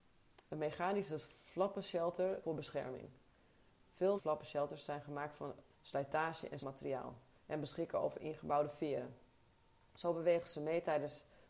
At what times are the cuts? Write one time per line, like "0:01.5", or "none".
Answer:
0:02.4
0:04.2
0:05.7
0:06.6